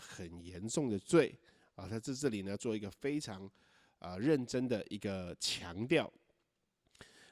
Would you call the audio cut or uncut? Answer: uncut